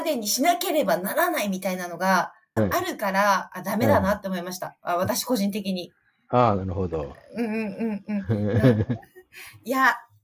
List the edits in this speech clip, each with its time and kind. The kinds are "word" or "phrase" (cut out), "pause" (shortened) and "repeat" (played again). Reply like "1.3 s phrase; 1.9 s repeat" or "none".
2.6 s word